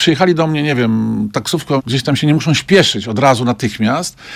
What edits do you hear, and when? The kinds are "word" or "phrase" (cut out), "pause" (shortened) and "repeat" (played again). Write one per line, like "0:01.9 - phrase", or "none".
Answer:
0:01.8 - word